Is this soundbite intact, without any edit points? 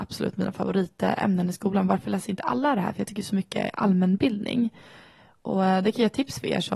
yes; 0 cuts

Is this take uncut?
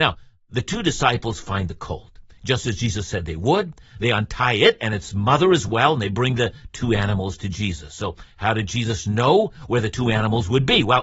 yes; 0 cuts

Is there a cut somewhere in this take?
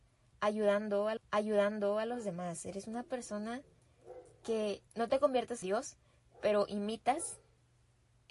yes; 3 cuts; at 1.2 s, 4.9 s, 5.6 s

